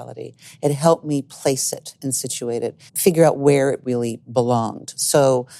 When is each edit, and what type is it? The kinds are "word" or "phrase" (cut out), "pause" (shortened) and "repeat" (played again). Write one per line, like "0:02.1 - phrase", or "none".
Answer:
0:02.9 - pause

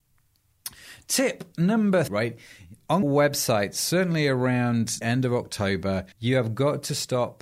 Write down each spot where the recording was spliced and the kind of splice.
0:02.1 - word
0:03.0 - word
0:05.0 - word
0:06.1 - pause

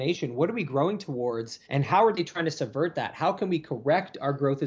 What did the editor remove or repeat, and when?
0:01.6 - pause

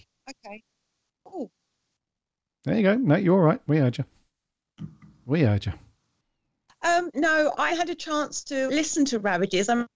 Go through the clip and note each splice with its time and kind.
0:07.1 - word
0:07.7 - word
0:08.7 - word

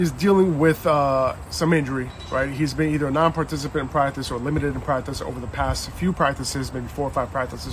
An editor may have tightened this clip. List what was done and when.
none

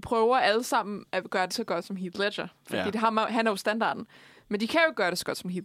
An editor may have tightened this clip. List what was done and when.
0:01.5 - word

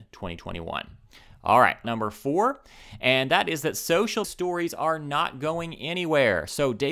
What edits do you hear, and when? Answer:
0:01.8 - phrase
0:04.2 - word

